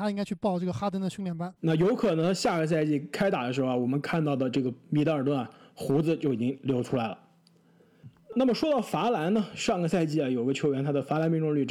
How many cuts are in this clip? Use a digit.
1